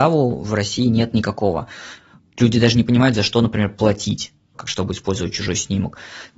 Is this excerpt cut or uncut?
uncut